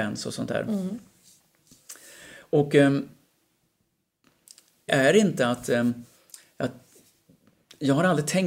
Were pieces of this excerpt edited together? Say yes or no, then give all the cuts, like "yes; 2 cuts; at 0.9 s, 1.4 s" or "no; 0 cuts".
yes; 1 cut; at 4.9 s